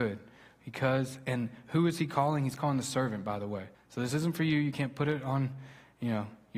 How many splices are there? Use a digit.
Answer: 1